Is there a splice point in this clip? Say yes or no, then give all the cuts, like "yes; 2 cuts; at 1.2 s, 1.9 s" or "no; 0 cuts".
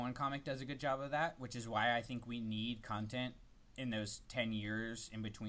no; 0 cuts